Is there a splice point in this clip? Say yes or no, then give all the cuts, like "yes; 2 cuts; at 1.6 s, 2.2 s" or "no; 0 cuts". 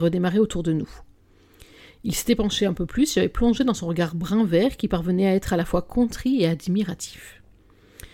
no; 0 cuts